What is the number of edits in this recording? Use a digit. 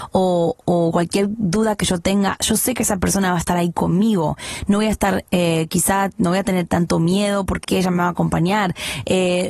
1